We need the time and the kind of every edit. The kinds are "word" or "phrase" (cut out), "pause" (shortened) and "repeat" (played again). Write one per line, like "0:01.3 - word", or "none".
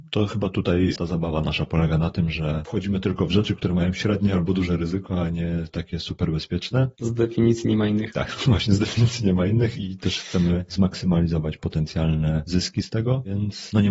0:01.0 - word